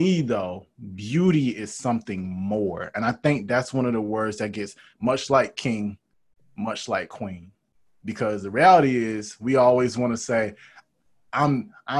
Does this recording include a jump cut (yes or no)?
no